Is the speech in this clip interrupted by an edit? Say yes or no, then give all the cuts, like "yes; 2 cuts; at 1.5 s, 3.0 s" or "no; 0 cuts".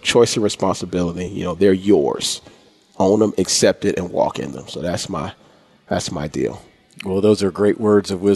no; 0 cuts